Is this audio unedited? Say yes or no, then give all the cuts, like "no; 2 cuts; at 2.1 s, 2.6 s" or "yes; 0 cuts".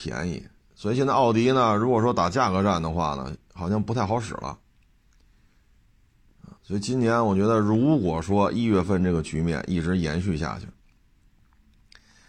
no; 1 cut; at 6.6 s